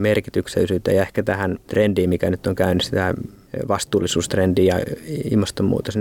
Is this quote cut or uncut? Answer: uncut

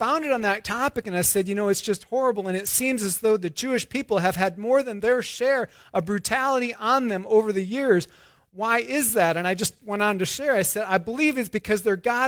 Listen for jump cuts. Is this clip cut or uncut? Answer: uncut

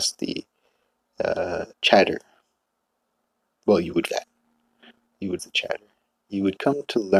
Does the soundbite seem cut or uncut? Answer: cut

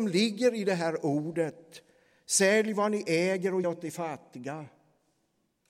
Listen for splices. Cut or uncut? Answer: cut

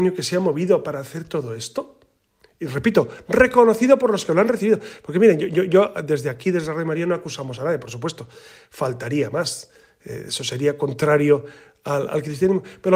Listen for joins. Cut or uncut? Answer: uncut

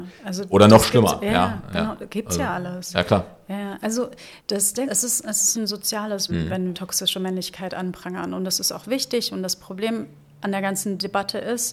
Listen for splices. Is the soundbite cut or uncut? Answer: cut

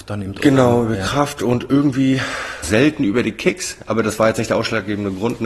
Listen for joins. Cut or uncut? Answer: cut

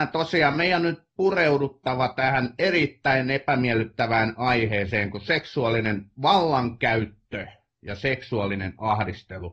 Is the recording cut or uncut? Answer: uncut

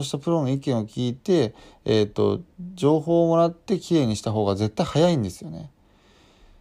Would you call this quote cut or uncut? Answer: uncut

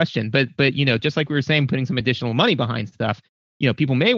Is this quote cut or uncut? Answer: uncut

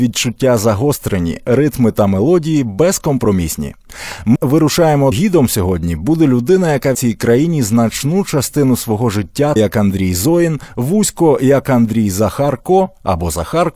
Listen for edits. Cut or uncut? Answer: cut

